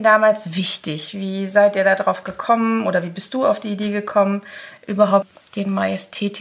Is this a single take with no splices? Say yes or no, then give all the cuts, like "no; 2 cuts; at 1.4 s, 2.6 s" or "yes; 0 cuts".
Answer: yes; 0 cuts